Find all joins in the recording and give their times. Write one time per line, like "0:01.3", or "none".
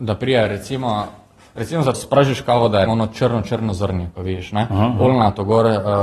0:01.9
0:02.9

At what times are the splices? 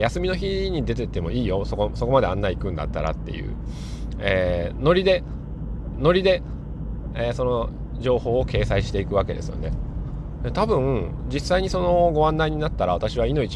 0:05.9

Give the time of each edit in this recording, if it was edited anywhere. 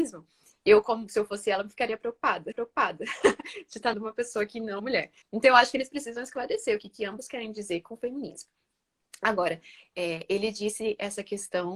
0:02.5
0:03.9
0:04.8
0:05.2

